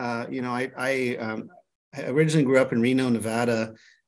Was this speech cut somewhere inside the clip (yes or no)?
no